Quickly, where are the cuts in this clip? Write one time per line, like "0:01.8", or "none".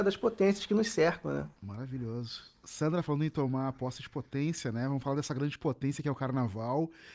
0:01.6